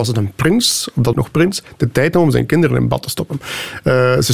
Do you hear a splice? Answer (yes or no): yes